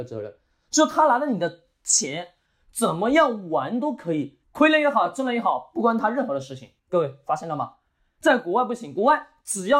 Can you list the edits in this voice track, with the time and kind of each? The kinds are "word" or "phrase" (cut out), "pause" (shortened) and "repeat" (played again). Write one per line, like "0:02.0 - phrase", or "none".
0:04.4 - pause
0:06.8 - pause